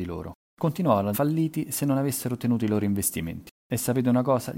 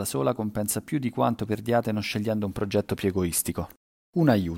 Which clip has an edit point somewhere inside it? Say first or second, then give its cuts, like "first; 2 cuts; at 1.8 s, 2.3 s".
first; 1 cut; at 1.1 s